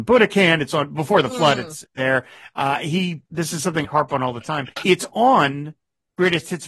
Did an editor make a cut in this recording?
yes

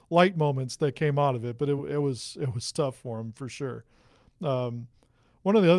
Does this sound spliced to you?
no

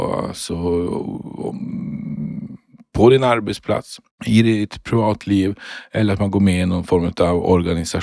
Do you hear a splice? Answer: no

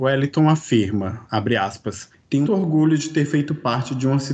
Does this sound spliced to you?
yes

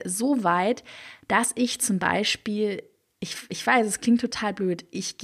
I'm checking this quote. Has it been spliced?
no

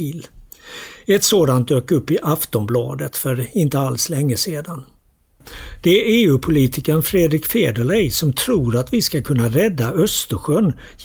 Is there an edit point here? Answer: no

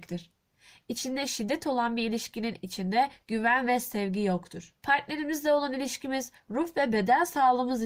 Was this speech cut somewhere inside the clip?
yes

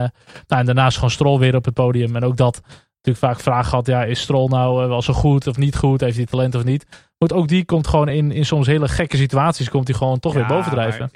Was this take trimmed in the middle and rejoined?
no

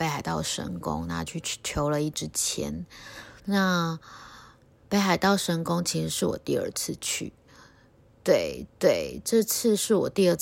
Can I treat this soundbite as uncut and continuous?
no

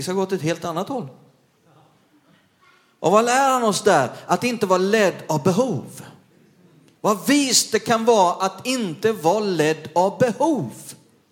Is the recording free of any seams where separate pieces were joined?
yes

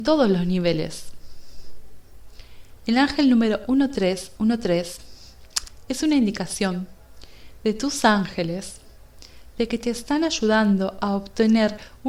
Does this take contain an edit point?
no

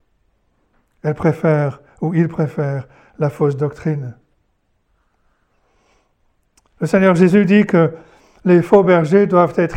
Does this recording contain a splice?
no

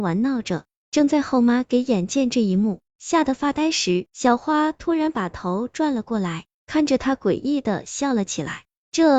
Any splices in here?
yes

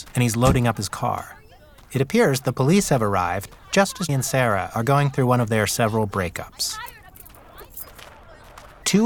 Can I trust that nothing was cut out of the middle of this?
no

